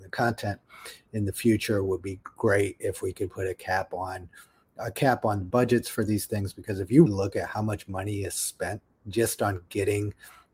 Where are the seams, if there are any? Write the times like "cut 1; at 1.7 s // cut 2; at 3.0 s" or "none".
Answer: cut 1; at 7.1 s